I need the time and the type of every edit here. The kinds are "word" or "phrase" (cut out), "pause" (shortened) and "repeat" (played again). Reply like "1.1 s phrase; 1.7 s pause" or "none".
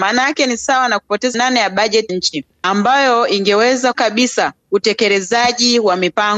1.3 s word; 2.1 s word; 3.9 s word